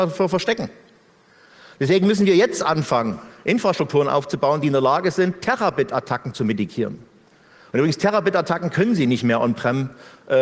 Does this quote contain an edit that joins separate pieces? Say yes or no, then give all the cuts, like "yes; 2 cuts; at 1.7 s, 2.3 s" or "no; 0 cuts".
no; 0 cuts